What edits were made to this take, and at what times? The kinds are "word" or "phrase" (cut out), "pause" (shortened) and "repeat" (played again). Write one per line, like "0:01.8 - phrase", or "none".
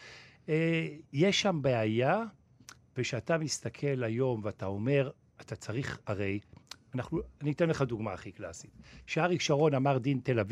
none

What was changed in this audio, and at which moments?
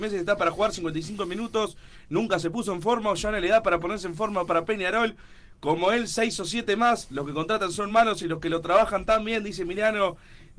none

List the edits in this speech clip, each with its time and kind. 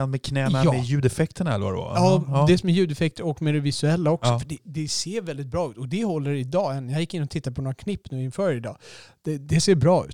none

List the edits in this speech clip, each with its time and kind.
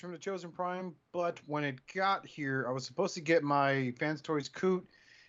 0:01.8 - pause

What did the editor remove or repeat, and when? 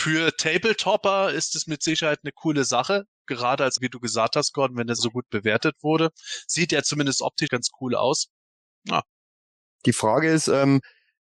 0:03.8 - word
0:05.0 - word
0:07.5 - word

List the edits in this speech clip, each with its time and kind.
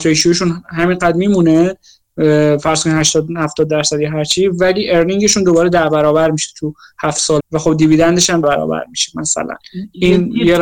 0:07.4 - word
0:08.4 - word

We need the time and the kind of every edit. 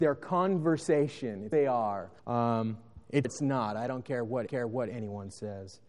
0:01.5 - word
0:02.2 - pause
0:03.2 - phrase
0:04.5 - repeat

